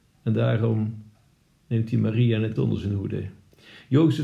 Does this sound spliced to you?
yes; 1 cut; at 2.6 s

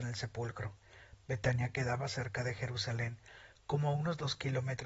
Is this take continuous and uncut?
yes; 0 cuts

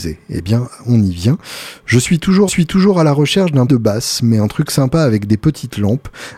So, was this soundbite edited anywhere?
yes; 2 cuts; at 2.5 s, 3.7 s

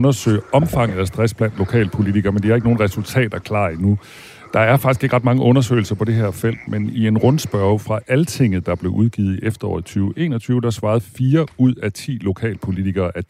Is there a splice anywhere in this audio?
no; 0 cuts

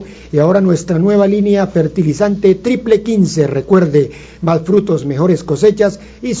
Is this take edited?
no; 0 cuts

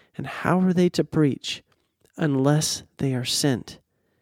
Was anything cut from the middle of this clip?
no; 0 cuts

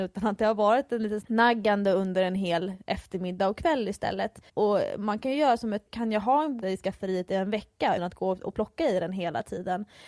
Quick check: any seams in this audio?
yes; 5 cuts; at 1.2 s, 4.5 s, 5.9 s, 6.6 s, 8.0 s

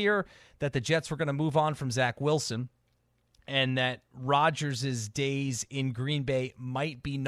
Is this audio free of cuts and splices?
yes; 0 cuts

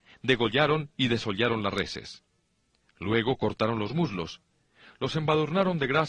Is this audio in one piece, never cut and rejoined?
yes; 0 cuts

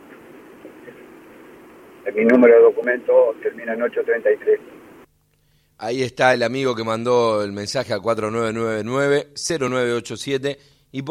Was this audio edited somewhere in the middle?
no; 0 cuts

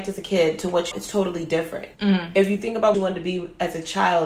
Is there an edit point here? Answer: yes; 3 cuts; at 0.9 s, 1.9 s, 2.9 s

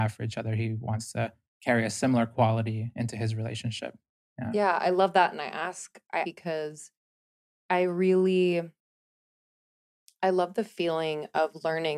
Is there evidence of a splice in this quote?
yes; 2 cuts; at 1.5 s, 6.2 s

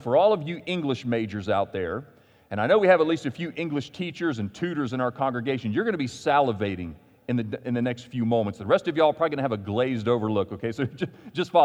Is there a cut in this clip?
no; 0 cuts

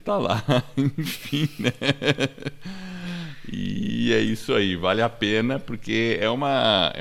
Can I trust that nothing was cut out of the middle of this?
yes; 0 cuts

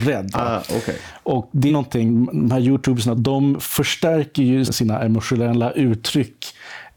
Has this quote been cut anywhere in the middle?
yes; 3 cuts; at 1.7 s, 3.1 s, 4.6 s

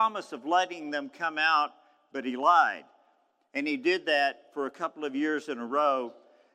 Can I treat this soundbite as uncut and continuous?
yes; 0 cuts

